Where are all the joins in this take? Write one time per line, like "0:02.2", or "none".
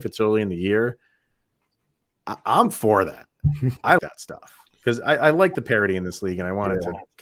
0:04.0